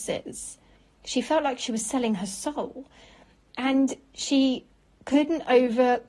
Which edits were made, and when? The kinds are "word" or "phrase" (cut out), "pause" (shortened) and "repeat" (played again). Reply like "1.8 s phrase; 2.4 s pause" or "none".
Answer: none